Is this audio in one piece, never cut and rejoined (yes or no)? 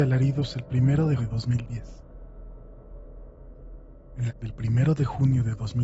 no